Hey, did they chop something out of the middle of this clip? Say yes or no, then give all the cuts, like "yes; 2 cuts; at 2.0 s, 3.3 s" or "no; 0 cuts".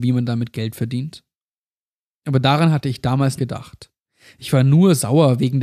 yes; 1 cut; at 3.4 s